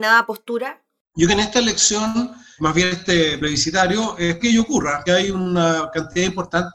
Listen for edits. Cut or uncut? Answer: cut